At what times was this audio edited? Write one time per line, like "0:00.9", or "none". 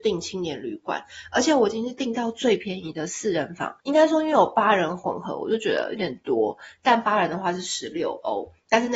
0:03.8